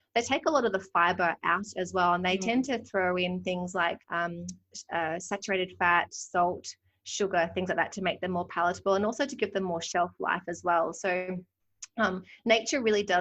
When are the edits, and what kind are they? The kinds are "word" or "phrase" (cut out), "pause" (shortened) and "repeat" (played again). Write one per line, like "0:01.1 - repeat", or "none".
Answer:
0:04.0 - pause